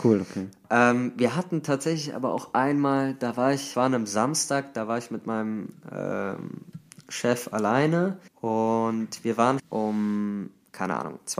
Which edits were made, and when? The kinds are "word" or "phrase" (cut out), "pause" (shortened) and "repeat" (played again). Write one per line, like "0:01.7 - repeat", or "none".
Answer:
0:03.7 - word
0:08.3 - pause
0:09.6 - word